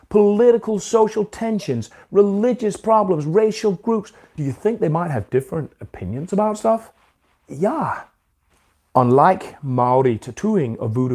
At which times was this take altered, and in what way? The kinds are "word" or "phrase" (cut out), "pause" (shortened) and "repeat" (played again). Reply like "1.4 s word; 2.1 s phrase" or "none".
none